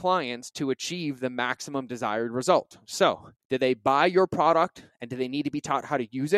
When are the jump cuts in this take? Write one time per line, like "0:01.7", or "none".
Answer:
0:03.4